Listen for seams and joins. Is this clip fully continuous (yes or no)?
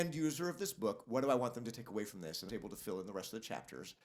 no